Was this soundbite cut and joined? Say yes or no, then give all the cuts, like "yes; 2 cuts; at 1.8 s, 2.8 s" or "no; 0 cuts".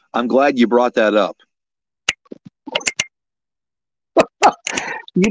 no; 0 cuts